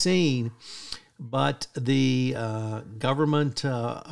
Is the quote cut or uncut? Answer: uncut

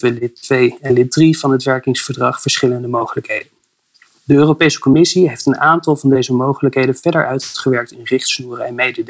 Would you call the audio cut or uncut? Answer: uncut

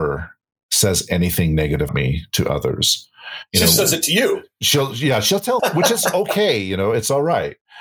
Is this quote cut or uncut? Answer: cut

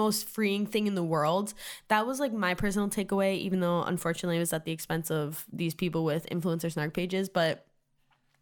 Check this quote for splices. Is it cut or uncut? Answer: uncut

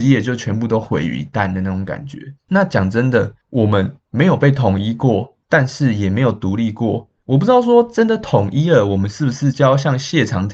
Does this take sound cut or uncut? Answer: cut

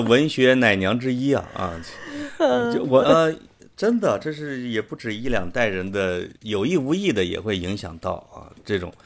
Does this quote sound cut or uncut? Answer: cut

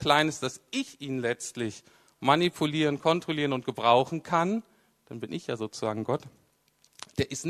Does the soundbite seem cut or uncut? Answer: uncut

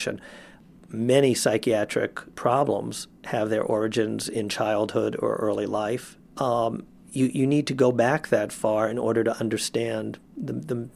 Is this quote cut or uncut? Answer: cut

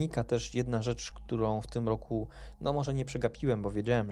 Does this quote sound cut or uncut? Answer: uncut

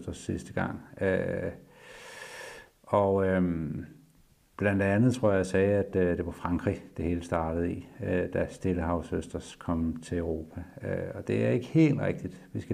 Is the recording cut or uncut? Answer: uncut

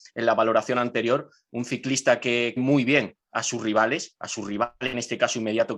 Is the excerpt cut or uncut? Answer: cut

